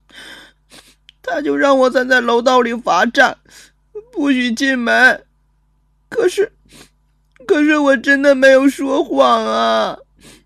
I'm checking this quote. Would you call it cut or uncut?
uncut